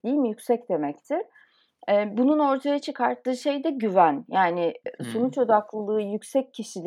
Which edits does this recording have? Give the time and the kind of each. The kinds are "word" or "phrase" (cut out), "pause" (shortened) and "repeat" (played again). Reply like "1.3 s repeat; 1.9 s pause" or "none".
none